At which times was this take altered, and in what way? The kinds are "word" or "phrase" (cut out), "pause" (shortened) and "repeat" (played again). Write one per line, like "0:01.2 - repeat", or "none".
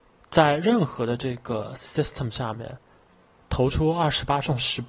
none